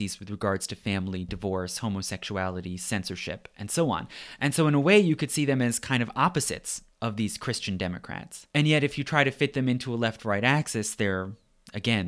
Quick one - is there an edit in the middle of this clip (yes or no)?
yes